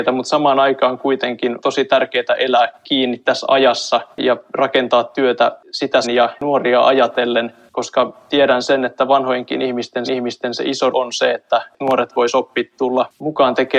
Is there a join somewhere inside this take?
yes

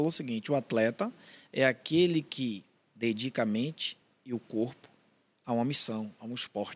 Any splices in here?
no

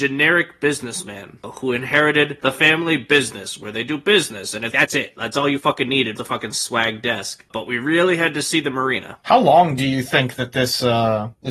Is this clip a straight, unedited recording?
no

